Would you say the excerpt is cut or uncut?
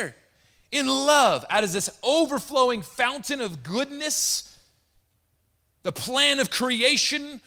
uncut